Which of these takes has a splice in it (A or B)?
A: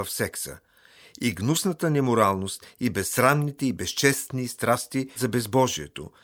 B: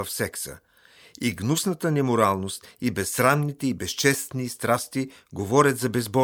A